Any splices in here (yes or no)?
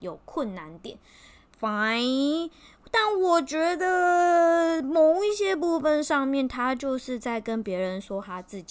no